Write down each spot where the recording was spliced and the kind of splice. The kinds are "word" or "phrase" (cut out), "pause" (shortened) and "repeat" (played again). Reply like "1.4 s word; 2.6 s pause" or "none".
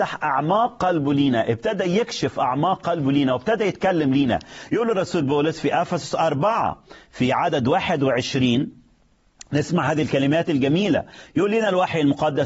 none